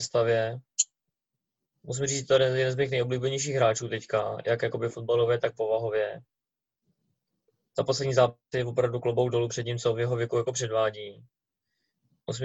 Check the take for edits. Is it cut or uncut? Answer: uncut